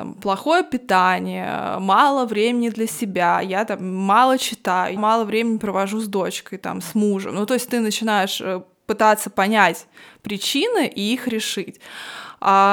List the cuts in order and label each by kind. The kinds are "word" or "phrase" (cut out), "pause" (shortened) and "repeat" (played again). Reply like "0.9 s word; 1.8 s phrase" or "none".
5.0 s word